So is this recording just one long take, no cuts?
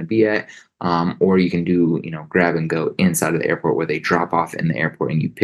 yes; 0 cuts

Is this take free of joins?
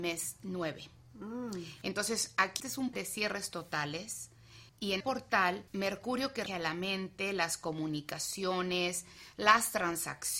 no; 6 cuts; at 2.6 s, 2.9 s, 4.7 s, 5.0 s, 5.7 s, 6.5 s

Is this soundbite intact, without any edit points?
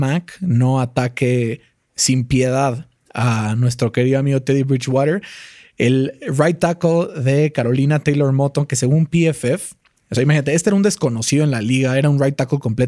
yes; 0 cuts

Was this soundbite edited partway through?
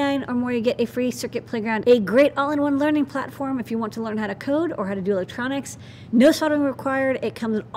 yes; 1 cut; at 1.8 s

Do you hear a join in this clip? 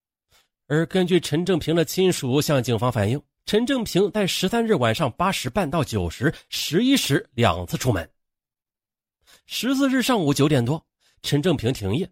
yes; 1 cut; at 3.4 s

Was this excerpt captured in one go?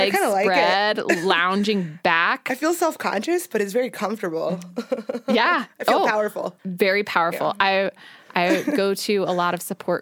no; 1 cut; at 6.6 s

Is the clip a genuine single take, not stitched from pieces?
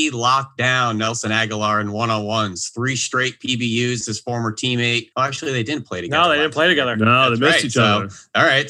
no; 2 cuts; at 4.0 s, 5.1 s

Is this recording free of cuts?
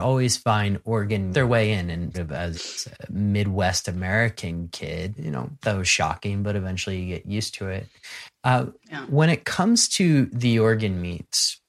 no; 5 cuts; at 1.3 s, 2.1 s, 2.5 s, 5.2 s, 5.6 s

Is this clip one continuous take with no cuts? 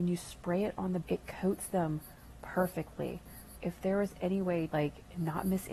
no; 4 cuts; at 1.0 s, 2.4 s, 3.6 s, 4.7 s

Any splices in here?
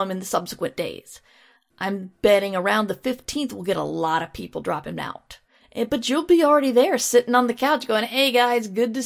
no; 0 cuts

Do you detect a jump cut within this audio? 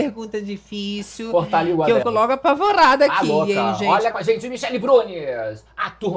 yes; 2 cuts; at 2.0 s, 4.1 s

